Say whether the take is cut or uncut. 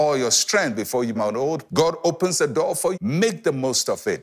cut